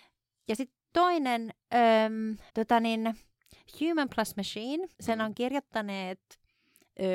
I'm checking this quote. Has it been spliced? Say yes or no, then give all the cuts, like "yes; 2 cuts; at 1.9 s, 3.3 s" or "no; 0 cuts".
yes; 2 cuts; at 2.5 s, 4.9 s